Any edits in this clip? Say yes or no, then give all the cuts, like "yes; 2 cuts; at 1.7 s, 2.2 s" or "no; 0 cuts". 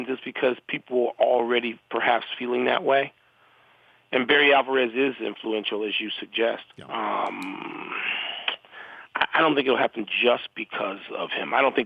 yes; 1 cut; at 6.7 s